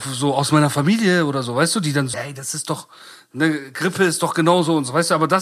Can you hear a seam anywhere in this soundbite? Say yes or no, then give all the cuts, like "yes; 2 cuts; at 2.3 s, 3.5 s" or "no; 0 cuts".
yes; 1 cut; at 2.1 s